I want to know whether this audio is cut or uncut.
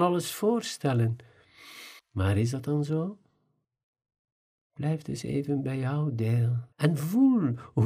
cut